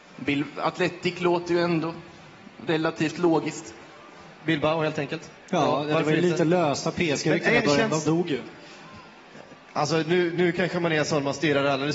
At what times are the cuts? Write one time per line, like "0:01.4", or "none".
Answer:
0:04.3
0:05.4